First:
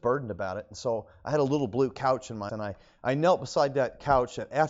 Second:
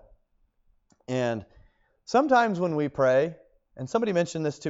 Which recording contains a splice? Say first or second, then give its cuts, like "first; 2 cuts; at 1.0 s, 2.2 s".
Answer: first; 1 cut; at 2.5 s